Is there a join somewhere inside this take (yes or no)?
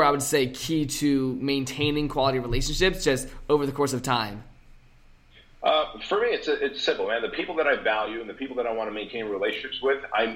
no